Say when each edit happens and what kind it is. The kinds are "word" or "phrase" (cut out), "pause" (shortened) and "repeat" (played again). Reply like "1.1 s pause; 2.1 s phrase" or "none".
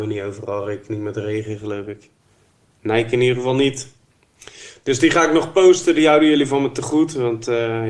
none